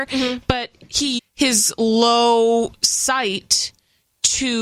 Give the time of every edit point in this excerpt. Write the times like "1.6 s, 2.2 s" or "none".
1.2 s